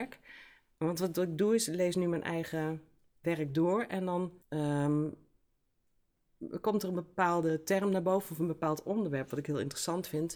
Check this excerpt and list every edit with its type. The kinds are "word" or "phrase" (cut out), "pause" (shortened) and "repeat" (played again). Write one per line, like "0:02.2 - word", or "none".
0:03.2 - word
0:04.4 - pause